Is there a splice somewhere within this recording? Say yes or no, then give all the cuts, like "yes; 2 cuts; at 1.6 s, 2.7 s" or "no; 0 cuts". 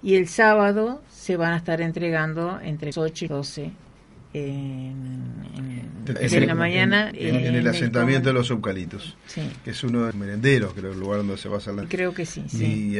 yes; 6 cuts; at 2.9 s, 3.3 s, 6.2 s, 7.1 s, 10.1 s, 11.8 s